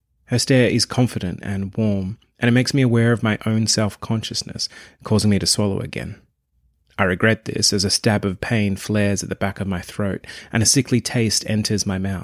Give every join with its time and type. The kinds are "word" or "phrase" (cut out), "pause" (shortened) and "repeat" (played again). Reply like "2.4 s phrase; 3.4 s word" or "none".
none